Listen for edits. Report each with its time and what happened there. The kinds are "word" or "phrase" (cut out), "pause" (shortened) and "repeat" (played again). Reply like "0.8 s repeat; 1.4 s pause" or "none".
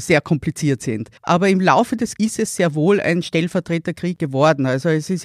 1.2 s pause; 2.2 s word